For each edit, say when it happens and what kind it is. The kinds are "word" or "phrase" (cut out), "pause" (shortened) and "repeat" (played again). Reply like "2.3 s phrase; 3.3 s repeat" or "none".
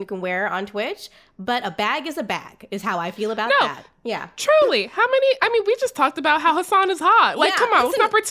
none

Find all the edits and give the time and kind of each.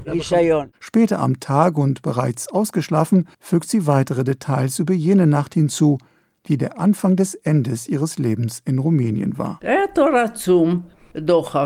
3.3 s pause

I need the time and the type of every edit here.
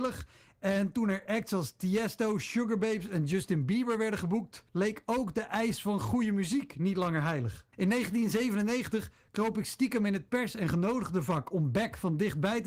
4.7 s pause; 7.7 s pause

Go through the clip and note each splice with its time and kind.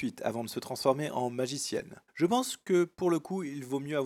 2.1 s pause

